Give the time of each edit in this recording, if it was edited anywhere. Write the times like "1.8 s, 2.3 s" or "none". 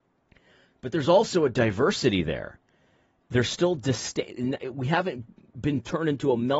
none